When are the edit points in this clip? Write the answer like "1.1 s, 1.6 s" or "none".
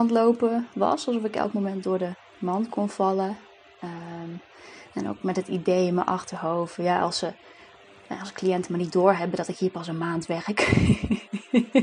none